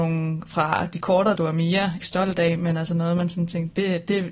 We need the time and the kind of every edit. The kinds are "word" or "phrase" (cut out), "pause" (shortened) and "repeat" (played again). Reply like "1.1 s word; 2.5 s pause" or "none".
1.4 s word; 2.0 s word